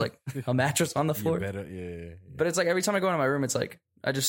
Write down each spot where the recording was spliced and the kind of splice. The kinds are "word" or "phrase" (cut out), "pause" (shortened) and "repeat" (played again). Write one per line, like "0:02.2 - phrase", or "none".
none